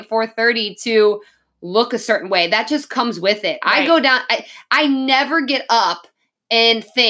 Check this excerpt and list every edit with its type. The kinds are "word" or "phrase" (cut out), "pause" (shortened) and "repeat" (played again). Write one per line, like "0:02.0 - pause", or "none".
none